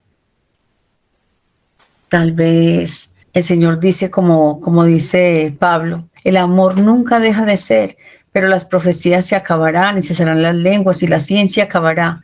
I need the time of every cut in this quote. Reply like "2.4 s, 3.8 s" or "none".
3.2 s, 6.2 s